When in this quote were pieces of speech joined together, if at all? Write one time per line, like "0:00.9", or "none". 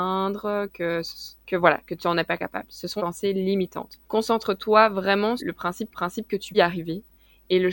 0:01.4
0:03.0
0:04.0
0:05.4
0:05.9
0:06.5